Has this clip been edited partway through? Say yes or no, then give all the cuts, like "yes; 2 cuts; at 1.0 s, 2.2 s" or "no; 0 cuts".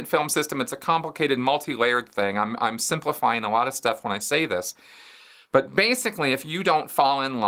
no; 0 cuts